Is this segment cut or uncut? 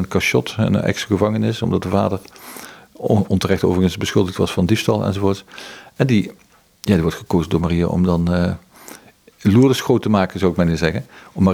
uncut